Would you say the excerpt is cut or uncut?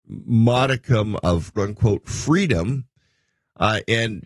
cut